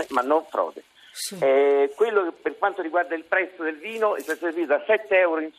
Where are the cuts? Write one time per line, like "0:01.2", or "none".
none